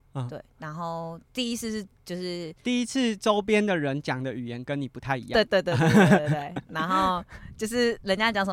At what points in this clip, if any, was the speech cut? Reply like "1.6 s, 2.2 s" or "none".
1.2 s